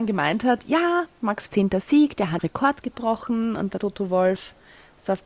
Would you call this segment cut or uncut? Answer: cut